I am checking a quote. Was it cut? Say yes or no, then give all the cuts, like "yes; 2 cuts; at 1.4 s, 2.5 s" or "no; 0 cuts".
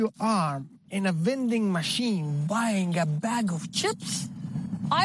no; 0 cuts